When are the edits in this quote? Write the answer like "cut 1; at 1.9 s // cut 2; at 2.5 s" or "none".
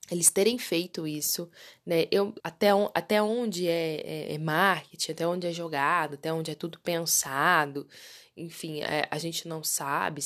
cut 1; at 2.4 s

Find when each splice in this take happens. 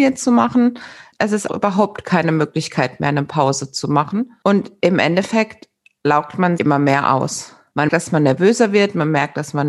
cut 1; at 1.5 s // cut 2; at 6.6 s // cut 3; at 7.9 s

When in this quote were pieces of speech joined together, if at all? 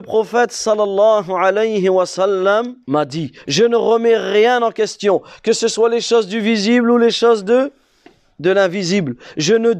cut 1; at 2.8 s

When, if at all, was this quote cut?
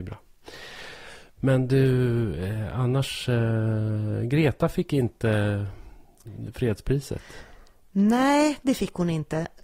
none

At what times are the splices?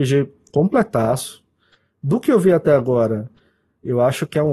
none

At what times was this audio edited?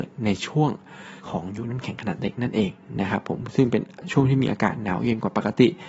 cut 1; at 1.2 s

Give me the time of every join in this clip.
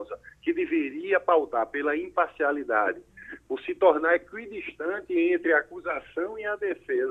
none

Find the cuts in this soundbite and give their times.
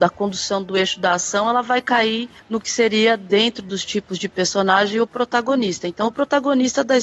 cut 1; at 2.4 s

